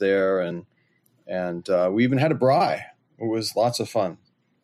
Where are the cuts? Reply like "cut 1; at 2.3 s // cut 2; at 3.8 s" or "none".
none